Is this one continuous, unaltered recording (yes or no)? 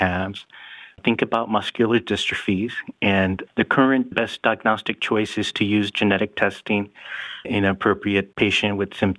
yes